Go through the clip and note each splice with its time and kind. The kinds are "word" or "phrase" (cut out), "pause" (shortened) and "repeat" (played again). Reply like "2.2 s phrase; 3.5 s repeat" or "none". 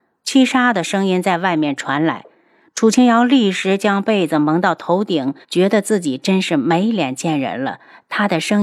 5.4 s pause

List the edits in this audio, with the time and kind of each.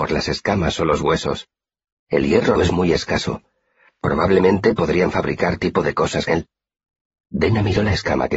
2.6 s word; 5.6 s word; 6.3 s word

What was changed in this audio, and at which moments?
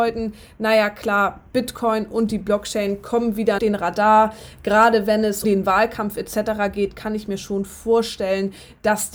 1.5 s pause; 3.6 s phrase; 5.4 s word

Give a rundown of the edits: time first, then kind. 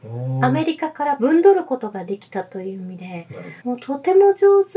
3.6 s pause

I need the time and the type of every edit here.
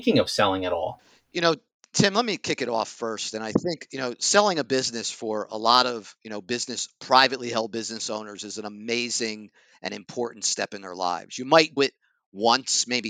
11.8 s word

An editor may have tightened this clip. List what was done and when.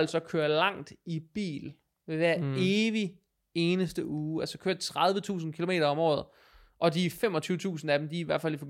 none

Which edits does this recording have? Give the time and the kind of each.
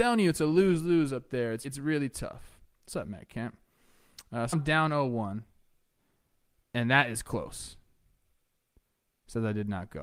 1.6 s word; 4.5 s word

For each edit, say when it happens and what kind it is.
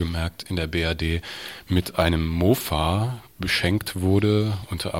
none

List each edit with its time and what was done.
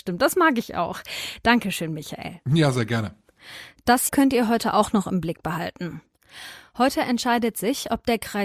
2.4 s pause; 4.1 s word

